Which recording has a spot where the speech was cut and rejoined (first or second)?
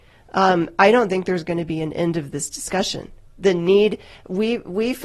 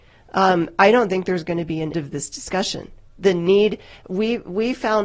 second